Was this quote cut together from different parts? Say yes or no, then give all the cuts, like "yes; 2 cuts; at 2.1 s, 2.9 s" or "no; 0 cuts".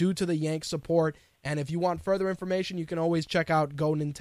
no; 0 cuts